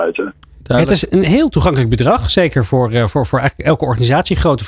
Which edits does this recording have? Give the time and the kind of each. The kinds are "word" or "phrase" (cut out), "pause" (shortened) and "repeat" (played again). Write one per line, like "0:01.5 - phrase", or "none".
none